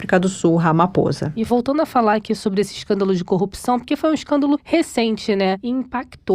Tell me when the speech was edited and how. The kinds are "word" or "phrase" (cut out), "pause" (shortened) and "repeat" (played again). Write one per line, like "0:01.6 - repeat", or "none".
none